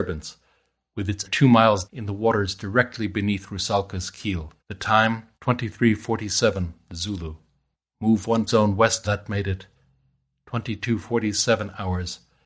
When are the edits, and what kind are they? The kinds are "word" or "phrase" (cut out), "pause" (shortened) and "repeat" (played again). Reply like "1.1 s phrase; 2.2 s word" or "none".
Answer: 1.2 s word; 1.8 s word; 4.6 s pause; 5.3 s pause; 7.7 s pause; 8.5 s word; 9.0 s phrase